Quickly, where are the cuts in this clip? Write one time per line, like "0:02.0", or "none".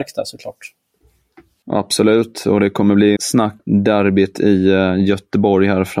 0:03.2
0:03.6